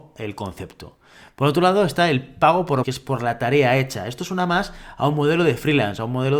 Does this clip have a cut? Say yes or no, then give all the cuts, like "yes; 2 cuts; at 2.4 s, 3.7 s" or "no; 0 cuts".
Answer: yes; 1 cut; at 2.8 s